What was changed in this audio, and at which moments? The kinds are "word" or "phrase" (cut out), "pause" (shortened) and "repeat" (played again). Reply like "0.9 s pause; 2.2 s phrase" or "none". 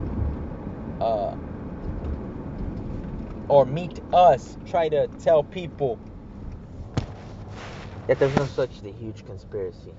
4.6 s word; 8.8 s phrase